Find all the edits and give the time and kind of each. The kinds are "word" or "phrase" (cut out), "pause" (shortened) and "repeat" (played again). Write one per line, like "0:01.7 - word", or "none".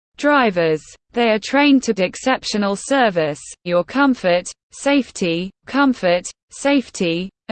0:01.0 - pause
0:02.0 - word
0:03.7 - word
0:05.6 - repeat